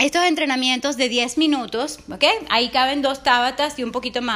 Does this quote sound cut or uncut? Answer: uncut